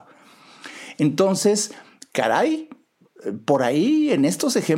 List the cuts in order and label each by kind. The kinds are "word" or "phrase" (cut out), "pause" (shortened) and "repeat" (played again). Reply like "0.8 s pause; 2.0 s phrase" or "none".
none